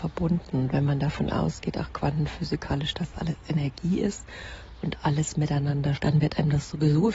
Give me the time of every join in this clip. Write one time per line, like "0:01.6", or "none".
0:06.0

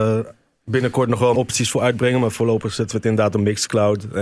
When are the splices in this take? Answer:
0:01.3

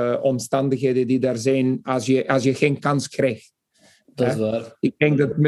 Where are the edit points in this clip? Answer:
none

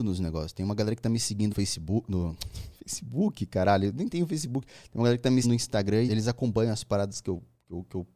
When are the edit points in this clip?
0:01.5
0:05.4
0:06.1

